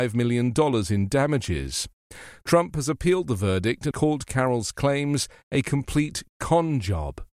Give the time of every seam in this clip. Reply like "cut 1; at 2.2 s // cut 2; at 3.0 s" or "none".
cut 1; at 3.9 s